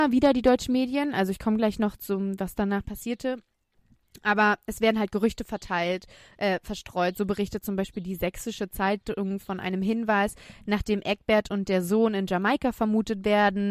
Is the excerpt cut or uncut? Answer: uncut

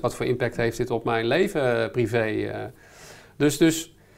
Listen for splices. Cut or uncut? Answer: uncut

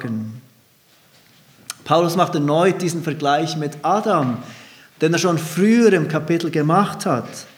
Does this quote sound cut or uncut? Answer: uncut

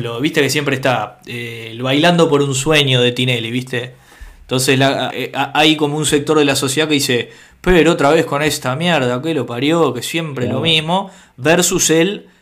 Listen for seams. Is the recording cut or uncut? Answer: cut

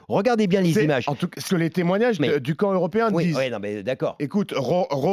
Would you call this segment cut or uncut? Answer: cut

